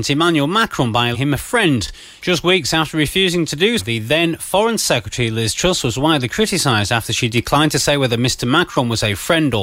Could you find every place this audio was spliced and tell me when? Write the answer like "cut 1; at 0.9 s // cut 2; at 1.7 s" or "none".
cut 1; at 1.1 s // cut 2; at 3.8 s